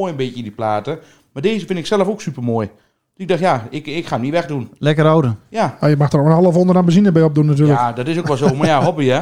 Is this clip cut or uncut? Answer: uncut